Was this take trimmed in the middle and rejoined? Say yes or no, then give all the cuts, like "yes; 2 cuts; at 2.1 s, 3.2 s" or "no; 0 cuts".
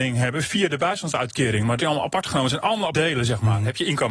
yes; 2 cuts; at 1.8 s, 2.9 s